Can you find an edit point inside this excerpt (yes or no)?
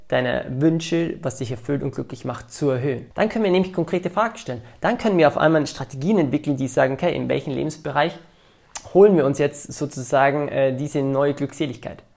yes